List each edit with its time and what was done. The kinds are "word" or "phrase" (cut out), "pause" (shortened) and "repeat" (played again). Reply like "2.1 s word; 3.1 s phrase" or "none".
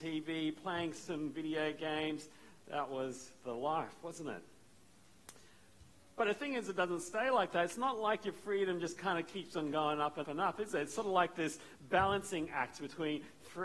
10.2 s word